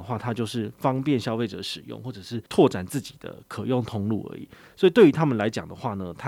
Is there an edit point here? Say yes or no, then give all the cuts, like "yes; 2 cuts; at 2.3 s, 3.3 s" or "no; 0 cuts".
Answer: yes; 1 cut; at 2.5 s